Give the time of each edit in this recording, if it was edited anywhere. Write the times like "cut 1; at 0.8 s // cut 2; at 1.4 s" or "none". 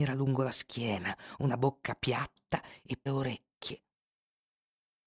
cut 1; at 3.1 s

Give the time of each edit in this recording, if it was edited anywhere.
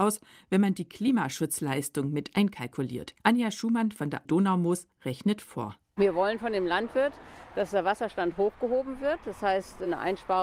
cut 1; at 3.2 s // cut 2; at 4.2 s

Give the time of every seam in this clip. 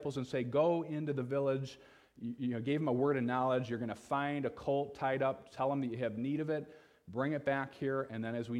none

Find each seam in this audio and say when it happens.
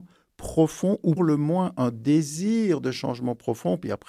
cut 1; at 1.2 s

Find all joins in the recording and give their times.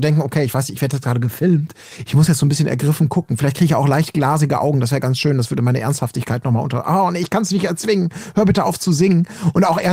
none

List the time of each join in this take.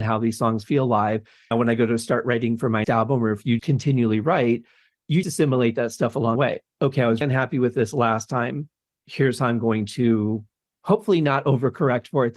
cut 1; at 1.5 s // cut 2; at 2.8 s // cut 3; at 3.6 s // cut 4; at 5.2 s // cut 5; at 6.4 s // cut 6; at 7.2 s

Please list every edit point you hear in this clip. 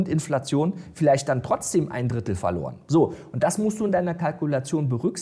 none

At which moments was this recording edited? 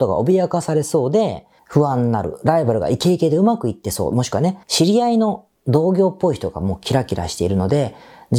cut 1; at 1.6 s // cut 2; at 4.6 s

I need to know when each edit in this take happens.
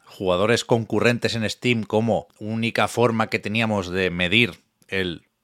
cut 1; at 2.3 s

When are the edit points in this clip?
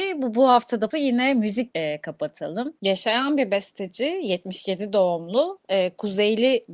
cut 1; at 0.9 s // cut 2; at 1.7 s

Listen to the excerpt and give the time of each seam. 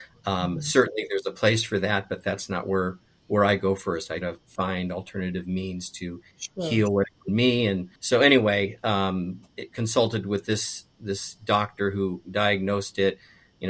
cut 1; at 4.2 s // cut 2; at 6.3 s // cut 3; at 7.3 s // cut 4; at 8.0 s

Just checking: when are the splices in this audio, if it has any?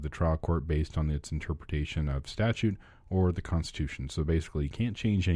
none

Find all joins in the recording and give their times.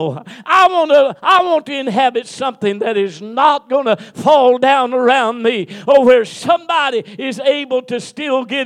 none

